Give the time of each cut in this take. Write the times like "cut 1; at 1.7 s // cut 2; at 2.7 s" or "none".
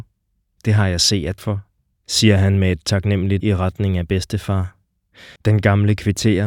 cut 1; at 1.4 s // cut 2; at 3.4 s // cut 3; at 5.4 s